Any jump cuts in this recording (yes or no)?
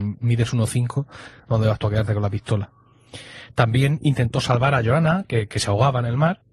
no